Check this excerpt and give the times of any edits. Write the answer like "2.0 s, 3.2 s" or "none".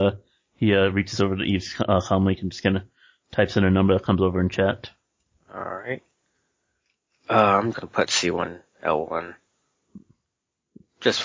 7.7 s